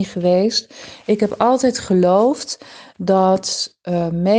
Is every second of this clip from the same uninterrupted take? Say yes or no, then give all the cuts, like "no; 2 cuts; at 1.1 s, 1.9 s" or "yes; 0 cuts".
yes; 0 cuts